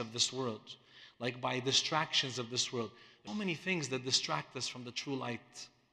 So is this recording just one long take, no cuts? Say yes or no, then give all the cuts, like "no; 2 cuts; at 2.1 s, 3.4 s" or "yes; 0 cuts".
no; 1 cut; at 3.3 s